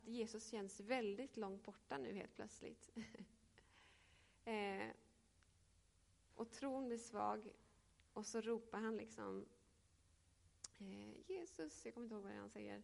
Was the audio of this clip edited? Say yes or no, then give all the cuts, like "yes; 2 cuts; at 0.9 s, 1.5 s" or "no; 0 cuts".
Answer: no; 0 cuts